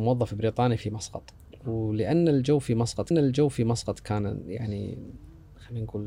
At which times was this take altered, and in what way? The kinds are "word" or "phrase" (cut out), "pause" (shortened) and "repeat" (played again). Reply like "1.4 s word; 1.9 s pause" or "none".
1.6 s pause; 3.1 s repeat